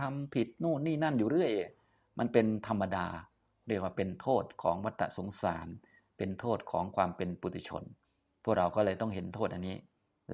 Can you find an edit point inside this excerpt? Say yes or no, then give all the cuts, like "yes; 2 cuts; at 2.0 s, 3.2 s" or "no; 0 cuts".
no; 0 cuts